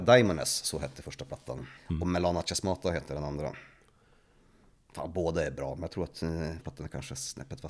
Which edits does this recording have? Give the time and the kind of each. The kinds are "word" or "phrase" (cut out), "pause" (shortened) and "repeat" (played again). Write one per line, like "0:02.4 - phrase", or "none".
0:01.8 - pause
0:06.6 - word